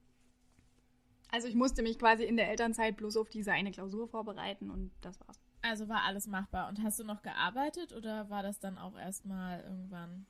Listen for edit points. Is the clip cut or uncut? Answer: uncut